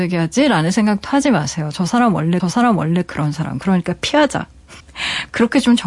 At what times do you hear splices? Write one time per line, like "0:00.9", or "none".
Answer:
0:02.4
0:04.8